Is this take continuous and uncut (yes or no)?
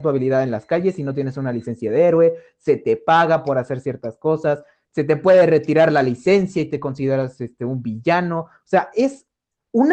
yes